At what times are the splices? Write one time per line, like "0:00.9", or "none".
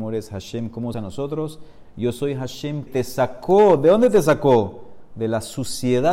0:00.9
0:02.9